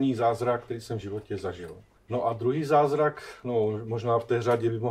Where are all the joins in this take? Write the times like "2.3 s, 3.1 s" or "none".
2.0 s